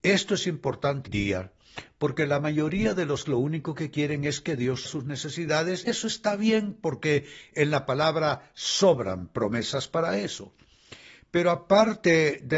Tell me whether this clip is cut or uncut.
cut